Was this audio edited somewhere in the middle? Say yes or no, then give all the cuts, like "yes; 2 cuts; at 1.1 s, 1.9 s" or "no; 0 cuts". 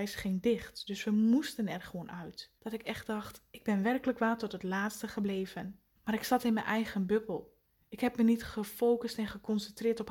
yes; 3 cuts; at 2.6 s, 6.0 s, 7.8 s